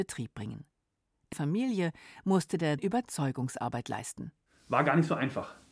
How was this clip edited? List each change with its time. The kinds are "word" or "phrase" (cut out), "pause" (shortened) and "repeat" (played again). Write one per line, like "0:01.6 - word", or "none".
0:01.3 - word
0:02.8 - phrase